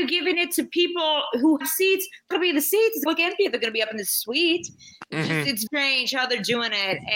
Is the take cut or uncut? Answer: cut